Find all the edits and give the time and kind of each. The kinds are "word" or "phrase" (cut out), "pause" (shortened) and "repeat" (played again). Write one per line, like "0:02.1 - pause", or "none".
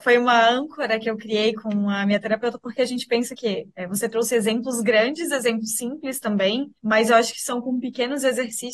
0:06.8 - pause